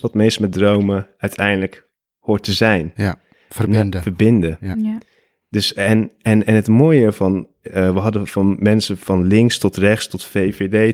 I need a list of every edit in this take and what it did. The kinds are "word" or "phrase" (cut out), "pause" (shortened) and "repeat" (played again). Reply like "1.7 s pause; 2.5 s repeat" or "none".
none